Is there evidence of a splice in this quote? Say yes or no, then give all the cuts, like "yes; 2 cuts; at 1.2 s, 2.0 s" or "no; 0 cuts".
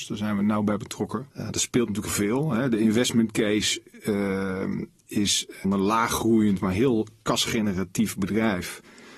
yes; 3 cuts; at 1.3 s, 2.1 s, 5.6 s